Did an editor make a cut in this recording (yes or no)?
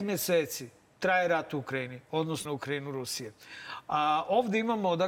yes